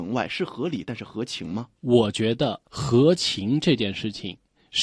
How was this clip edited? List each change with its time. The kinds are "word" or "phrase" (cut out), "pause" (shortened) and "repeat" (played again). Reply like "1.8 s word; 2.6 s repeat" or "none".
1.8 s pause; 2.6 s pause